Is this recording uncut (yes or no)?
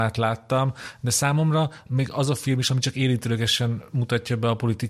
yes